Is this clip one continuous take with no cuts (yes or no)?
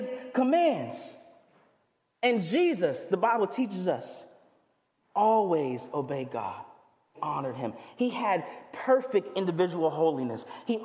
no